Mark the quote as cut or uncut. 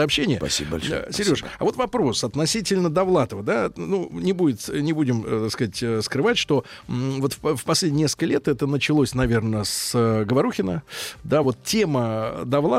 uncut